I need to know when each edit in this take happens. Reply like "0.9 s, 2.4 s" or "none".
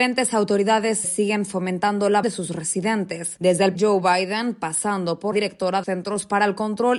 1.0 s, 2.2 s, 3.7 s, 5.3 s, 5.8 s